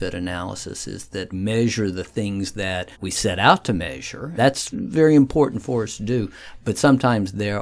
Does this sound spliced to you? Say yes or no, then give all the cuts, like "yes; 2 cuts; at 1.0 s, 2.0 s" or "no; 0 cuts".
yes; 4 cuts; at 1.3 s, 2.9 s, 4.4 s, 4.7 s